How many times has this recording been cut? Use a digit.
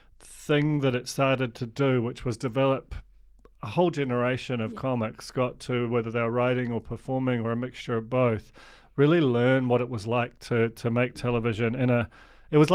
0